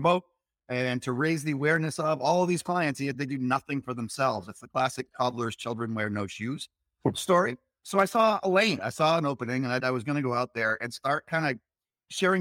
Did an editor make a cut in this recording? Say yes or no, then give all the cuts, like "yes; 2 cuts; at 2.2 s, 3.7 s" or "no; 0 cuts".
yes; 1 cut; at 9.8 s